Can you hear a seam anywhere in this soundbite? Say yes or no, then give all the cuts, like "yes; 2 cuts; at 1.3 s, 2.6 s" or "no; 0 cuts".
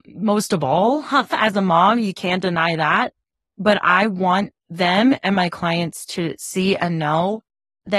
no; 0 cuts